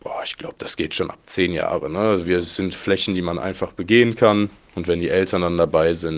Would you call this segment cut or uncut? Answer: uncut